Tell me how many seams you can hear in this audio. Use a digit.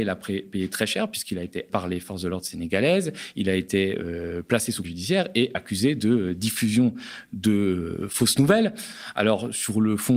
2